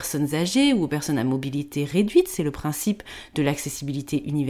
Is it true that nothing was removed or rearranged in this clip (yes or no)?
yes